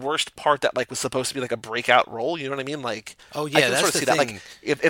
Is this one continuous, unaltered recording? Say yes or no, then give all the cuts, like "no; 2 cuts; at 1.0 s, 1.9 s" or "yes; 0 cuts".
yes; 0 cuts